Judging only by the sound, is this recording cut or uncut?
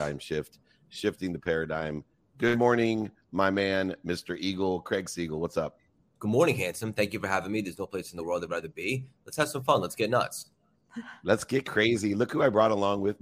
uncut